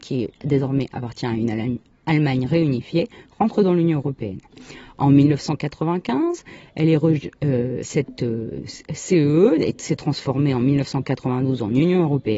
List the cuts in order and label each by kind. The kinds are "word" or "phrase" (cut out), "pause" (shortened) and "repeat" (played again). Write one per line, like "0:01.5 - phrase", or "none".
none